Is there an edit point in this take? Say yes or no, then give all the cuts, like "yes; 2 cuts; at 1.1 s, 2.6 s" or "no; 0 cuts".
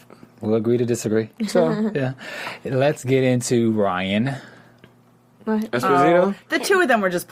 no; 0 cuts